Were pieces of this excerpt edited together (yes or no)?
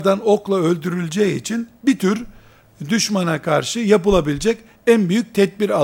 no